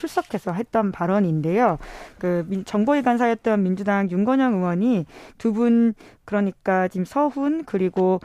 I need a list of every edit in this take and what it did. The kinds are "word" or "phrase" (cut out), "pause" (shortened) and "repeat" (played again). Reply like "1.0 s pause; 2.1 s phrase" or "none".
none